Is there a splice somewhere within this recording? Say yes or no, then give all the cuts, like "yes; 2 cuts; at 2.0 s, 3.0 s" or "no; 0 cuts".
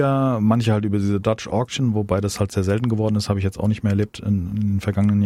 no; 0 cuts